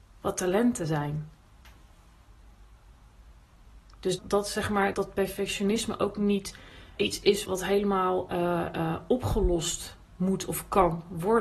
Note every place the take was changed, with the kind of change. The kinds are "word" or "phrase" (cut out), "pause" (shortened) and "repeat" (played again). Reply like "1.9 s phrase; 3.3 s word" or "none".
4.2 s word; 4.9 s word; 7.0 s word; 7.4 s word